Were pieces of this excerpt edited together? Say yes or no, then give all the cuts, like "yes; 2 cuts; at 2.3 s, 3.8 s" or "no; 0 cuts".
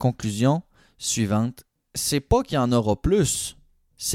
no; 0 cuts